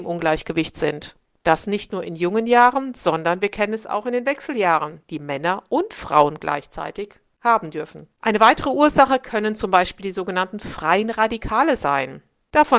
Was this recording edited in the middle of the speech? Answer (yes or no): no